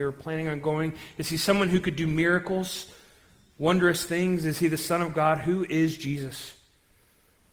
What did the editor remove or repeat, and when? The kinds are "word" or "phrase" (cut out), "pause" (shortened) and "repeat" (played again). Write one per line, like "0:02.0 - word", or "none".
none

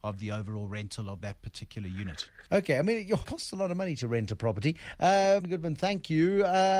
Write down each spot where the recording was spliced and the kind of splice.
0:02.5 - pause
0:03.2 - word
0:05.4 - word

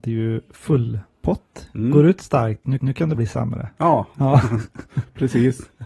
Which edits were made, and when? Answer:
0:02.8 - repeat
0:03.1 - word

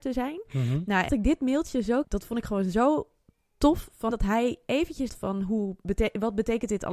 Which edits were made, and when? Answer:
0:01.1 - word
0:02.0 - word
0:04.1 - word
0:05.1 - word

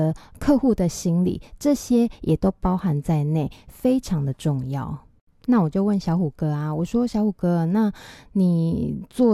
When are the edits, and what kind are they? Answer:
none

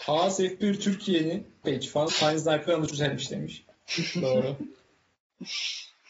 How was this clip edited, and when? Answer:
0:01.6 - word
0:02.1 - word
0:02.9 - word
0:03.7 - pause

